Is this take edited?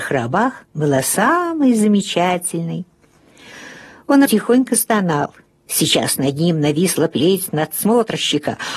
yes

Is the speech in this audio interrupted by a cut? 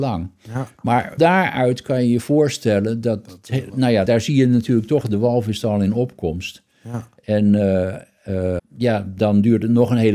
yes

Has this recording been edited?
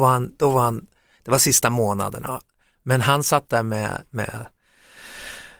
no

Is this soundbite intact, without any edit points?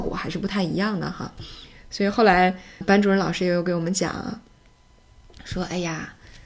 no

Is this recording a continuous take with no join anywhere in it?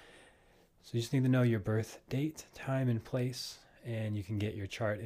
yes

